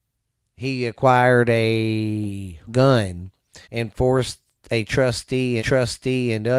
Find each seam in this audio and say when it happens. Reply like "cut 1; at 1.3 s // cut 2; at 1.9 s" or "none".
cut 1; at 2.7 s // cut 2; at 3.6 s // cut 3; at 5.6 s